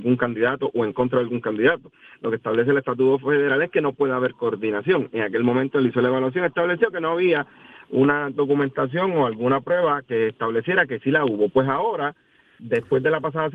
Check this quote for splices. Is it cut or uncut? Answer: uncut